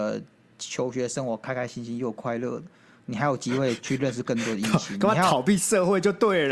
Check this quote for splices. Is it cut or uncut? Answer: uncut